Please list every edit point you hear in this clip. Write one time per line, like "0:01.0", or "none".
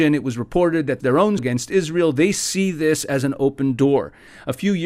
0:01.0
0:01.4